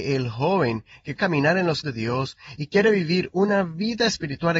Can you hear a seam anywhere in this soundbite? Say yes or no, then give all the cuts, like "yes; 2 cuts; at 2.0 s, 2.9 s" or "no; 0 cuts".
yes; 2 cuts; at 1.2 s, 1.8 s